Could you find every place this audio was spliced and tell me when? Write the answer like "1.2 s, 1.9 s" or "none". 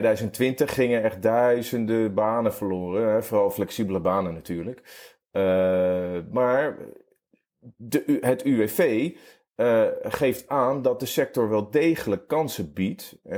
none